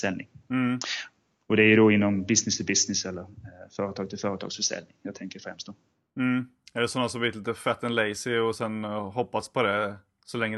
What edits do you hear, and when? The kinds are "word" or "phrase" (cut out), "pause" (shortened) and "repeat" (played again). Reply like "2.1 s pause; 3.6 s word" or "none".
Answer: none